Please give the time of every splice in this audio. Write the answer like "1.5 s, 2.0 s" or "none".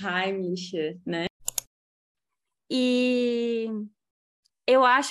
none